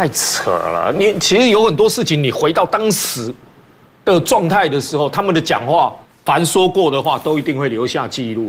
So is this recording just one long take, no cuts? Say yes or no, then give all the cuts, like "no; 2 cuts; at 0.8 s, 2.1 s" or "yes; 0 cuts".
no; 1 cut; at 6.0 s